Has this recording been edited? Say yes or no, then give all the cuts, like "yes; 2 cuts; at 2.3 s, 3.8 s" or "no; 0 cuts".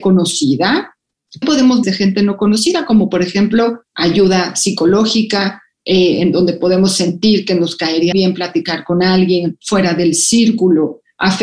yes; 4 cuts; at 1.4 s, 1.8 s, 3.9 s, 8.1 s